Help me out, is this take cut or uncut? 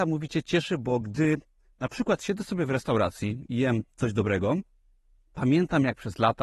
uncut